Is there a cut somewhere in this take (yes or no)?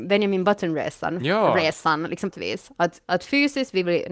yes